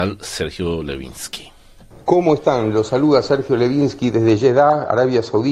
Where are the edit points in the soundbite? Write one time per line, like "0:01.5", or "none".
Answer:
none